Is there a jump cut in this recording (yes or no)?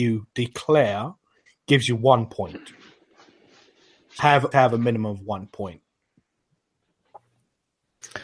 yes